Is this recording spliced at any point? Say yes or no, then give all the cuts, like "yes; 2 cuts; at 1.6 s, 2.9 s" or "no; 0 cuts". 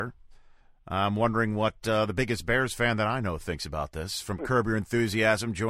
no; 0 cuts